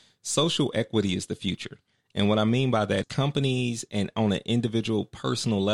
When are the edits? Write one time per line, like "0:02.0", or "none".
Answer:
0:03.0